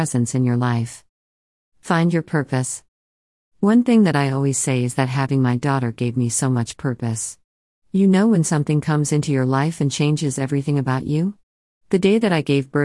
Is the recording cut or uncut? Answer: uncut